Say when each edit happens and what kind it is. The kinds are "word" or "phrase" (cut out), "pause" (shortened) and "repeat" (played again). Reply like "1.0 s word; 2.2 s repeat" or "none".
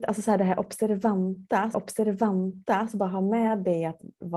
1.7 s repeat